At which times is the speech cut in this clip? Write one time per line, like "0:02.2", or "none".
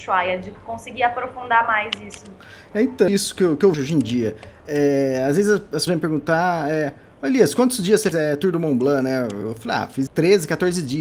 0:03.1
0:03.7
0:05.9
0:08.1
0:10.1